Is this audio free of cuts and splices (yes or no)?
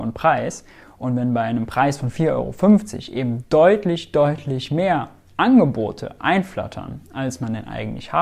yes